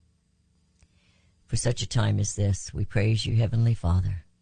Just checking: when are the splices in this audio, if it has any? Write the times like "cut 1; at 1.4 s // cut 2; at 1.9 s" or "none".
none